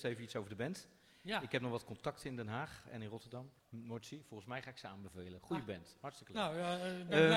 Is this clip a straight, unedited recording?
no; 1 cut; at 3.6 s

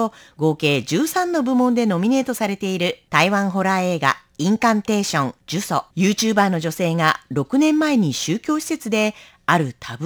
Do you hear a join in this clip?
yes; 2 cuts; at 5.4 s, 5.9 s

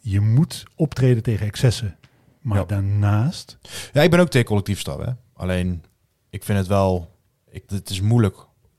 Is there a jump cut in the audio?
yes; 1 cut; at 7.7 s

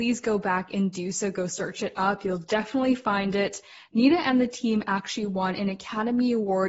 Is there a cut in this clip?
no; 0 cuts

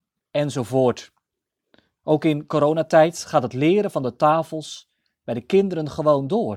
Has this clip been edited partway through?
no; 0 cuts

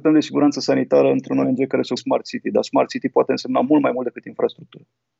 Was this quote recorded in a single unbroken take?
no; 1 cut; at 2.0 s

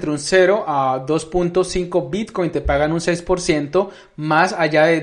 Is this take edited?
no; 0 cuts

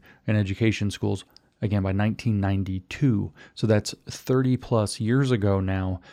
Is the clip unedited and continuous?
yes; 0 cuts

